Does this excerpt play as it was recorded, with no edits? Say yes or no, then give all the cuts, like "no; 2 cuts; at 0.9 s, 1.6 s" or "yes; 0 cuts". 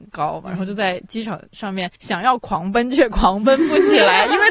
no; 1 cut; at 2.0 s